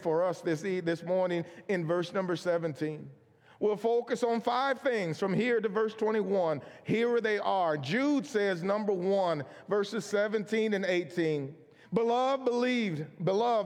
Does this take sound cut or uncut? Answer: uncut